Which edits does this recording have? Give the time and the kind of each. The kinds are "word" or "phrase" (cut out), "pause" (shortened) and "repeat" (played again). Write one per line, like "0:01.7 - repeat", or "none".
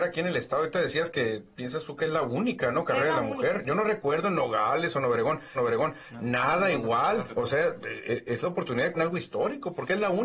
0:05.6 - repeat
0:07.3 - word
0:09.0 - word